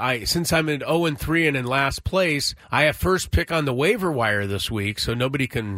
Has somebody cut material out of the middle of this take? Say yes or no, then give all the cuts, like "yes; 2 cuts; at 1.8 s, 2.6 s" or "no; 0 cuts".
yes; 1 cut; at 2.6 s